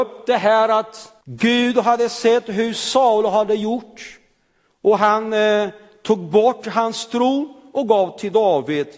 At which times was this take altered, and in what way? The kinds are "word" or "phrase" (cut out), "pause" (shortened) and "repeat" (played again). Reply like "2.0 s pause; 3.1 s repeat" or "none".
1.2 s pause